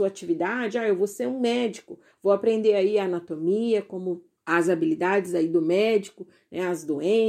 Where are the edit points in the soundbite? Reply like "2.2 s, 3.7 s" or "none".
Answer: 4.4 s